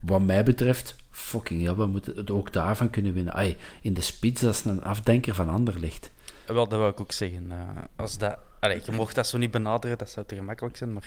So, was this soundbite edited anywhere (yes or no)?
no